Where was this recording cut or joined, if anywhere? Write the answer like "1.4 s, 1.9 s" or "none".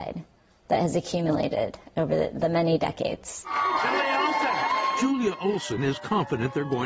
none